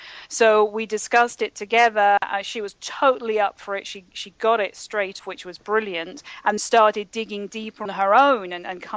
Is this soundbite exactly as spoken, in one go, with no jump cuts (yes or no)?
no